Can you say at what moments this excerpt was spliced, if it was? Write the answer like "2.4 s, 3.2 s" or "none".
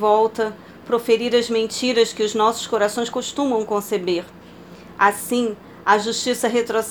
none